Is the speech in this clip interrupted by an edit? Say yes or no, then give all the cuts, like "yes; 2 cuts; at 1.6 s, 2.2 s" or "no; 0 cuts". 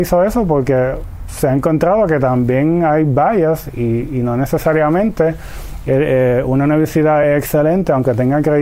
no; 0 cuts